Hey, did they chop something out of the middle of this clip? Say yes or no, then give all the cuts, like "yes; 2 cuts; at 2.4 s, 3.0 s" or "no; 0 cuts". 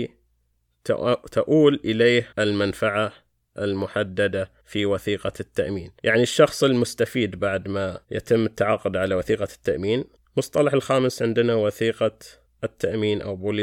yes; 6 cuts; at 2.3 s, 4.6 s, 6.0 s, 8.0 s, 10.2 s, 12.5 s